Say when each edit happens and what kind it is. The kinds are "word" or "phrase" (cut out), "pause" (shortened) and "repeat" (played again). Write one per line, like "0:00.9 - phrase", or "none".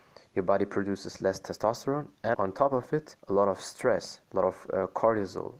0:02.3 - word
0:03.2 - pause
0:04.2 - pause